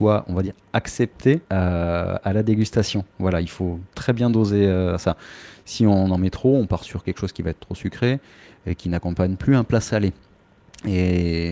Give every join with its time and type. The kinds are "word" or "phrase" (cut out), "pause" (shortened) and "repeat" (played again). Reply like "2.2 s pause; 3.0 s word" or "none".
1.4 s pause